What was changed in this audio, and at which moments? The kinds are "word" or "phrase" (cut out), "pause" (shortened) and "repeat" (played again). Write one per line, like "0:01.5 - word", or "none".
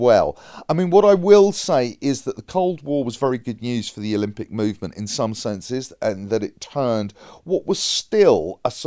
none